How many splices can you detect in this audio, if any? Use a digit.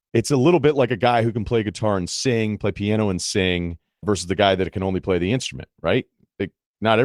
1